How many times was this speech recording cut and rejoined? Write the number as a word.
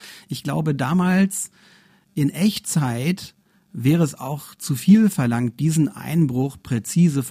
zero